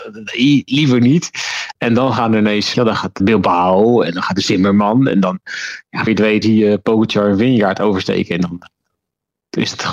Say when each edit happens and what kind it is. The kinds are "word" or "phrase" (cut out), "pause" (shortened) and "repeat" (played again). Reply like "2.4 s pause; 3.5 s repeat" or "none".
2.7 s word; 3.2 s word; 6.1 s word; 6.4 s word